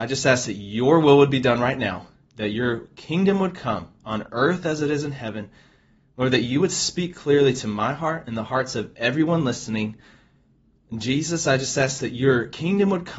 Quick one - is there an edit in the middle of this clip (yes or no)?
no